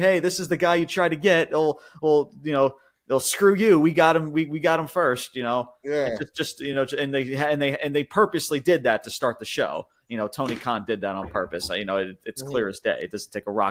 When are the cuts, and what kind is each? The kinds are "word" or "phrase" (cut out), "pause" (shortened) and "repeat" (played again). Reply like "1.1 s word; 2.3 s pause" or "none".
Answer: none